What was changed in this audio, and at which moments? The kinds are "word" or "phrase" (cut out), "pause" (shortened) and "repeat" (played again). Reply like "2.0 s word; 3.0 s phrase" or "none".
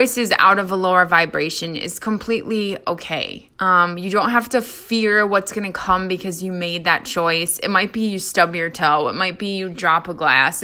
3.5 s pause